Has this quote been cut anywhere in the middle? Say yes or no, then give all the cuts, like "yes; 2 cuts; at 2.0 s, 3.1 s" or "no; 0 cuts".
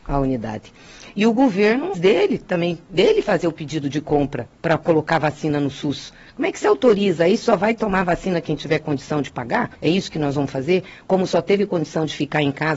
yes; 2 cuts; at 1.9 s, 9.7 s